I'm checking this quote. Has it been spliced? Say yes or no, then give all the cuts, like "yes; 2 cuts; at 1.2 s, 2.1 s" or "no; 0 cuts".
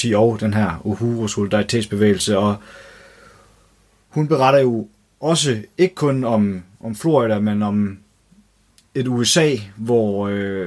no; 0 cuts